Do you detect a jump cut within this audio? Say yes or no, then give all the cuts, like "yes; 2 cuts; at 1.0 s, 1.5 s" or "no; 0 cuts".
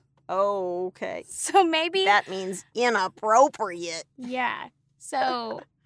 no; 0 cuts